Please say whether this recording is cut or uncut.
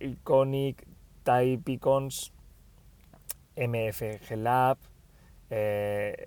uncut